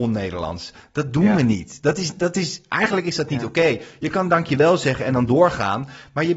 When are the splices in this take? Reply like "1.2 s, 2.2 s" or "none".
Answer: none

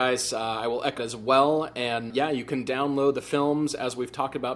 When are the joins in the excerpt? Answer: 1.0 s, 2.1 s

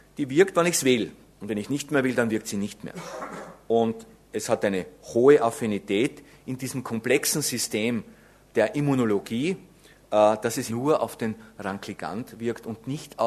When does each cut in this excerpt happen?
10.7 s

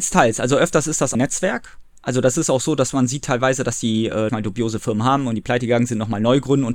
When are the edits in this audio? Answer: 1.1 s, 4.3 s

